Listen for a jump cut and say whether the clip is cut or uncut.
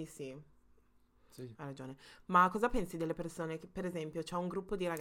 uncut